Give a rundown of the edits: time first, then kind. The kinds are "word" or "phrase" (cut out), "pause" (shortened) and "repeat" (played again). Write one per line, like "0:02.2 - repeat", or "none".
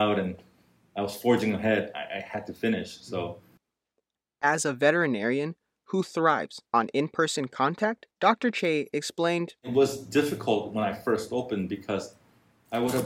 0:06.7 - pause
0:08.1 - pause
0:09.6 - pause